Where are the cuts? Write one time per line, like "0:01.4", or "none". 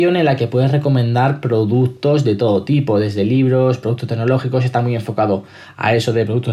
none